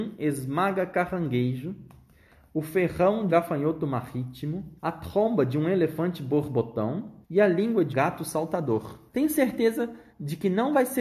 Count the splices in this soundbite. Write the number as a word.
six